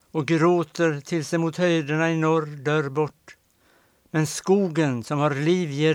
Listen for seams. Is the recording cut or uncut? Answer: uncut